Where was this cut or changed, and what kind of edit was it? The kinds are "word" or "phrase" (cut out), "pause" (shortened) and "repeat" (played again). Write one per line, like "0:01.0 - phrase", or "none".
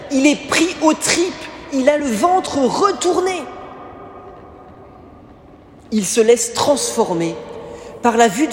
none